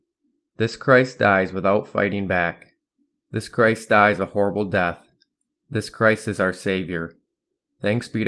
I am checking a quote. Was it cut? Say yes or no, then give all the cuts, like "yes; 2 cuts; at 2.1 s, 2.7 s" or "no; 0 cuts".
no; 0 cuts